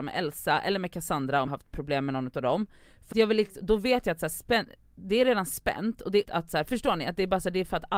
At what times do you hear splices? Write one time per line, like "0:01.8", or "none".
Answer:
0:01.5
0:03.1
0:06.3
0:06.7